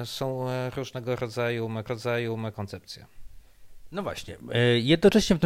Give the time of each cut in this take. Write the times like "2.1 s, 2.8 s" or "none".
1.9 s